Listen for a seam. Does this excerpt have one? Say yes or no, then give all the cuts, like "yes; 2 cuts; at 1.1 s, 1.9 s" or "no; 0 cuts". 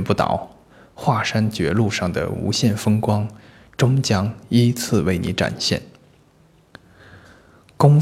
no; 0 cuts